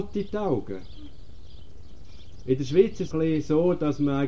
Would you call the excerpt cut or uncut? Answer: cut